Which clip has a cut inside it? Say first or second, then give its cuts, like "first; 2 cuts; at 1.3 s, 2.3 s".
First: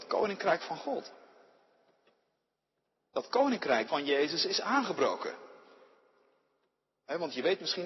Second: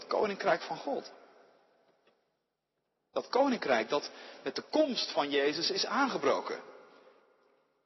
first; 1 cut; at 3.9 s